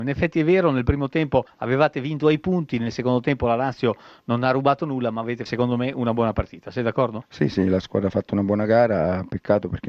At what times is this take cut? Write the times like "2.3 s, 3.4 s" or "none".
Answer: 5.5 s